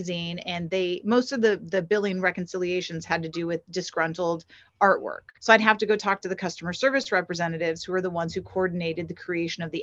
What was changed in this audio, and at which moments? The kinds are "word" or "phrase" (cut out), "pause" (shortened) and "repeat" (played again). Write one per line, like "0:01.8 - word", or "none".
0:05.4 - pause